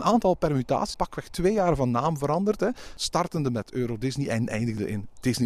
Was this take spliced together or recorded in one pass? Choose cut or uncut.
cut